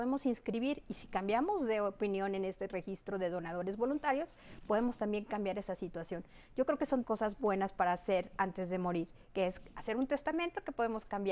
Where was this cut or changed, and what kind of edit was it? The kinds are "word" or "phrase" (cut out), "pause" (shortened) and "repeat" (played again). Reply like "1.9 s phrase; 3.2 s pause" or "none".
7.0 s word